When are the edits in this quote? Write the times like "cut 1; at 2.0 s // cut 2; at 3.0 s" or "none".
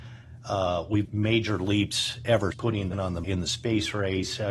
cut 1; at 1.0 s // cut 2; at 2.5 s // cut 3; at 2.9 s // cut 4; at 3.2 s